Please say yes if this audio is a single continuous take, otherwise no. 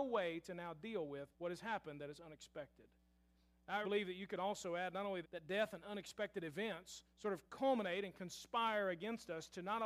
no